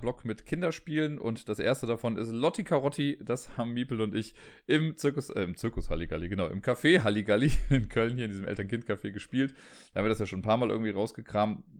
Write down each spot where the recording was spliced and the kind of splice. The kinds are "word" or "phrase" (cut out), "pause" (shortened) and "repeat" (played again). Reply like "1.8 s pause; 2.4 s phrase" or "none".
none